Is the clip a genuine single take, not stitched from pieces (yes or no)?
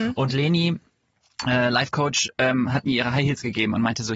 yes